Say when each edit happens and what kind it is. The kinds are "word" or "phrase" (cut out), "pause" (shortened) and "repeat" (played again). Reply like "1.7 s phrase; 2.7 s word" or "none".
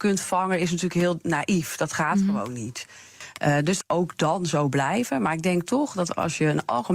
3.8 s phrase